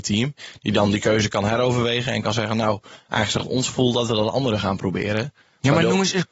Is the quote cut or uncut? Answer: uncut